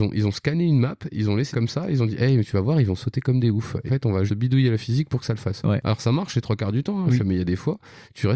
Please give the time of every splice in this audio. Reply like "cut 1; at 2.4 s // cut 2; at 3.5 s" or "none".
cut 1; at 1.5 s // cut 2; at 3.9 s // cut 3; at 4.3 s